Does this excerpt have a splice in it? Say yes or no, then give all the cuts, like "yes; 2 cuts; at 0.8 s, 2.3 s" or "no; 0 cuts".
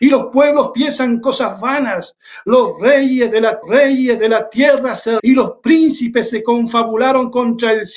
yes; 2 cuts; at 3.6 s, 5.2 s